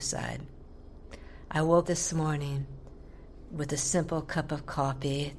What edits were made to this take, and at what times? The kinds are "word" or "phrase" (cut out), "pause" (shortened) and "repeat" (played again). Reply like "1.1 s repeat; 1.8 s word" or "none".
1.8 s word